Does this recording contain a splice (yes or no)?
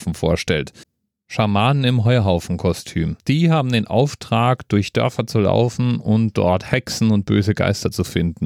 yes